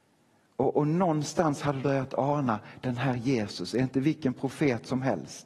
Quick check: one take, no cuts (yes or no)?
no